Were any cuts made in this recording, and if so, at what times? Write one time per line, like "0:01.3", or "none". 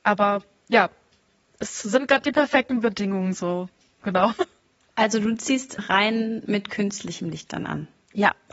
0:05.8